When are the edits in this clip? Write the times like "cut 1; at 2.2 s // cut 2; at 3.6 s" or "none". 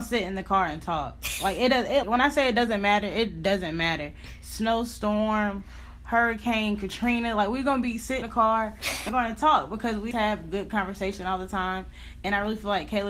cut 1; at 2.0 s // cut 2; at 8.2 s // cut 3; at 9.1 s // cut 4; at 10.1 s

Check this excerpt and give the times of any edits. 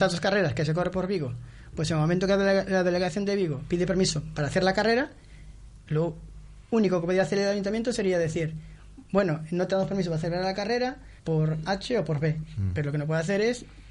cut 1; at 11.2 s

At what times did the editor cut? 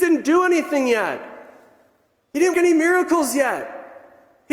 cut 1; at 2.5 s

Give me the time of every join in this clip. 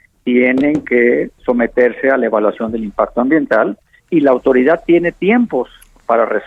none

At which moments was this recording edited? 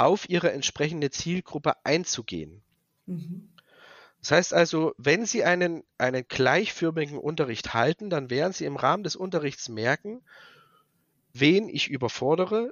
none

